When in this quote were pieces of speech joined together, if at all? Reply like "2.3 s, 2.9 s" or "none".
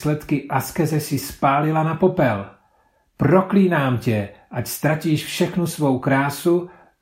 none